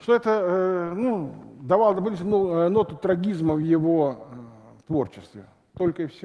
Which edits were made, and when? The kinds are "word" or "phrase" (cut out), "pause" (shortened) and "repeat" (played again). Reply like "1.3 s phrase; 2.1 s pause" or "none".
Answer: none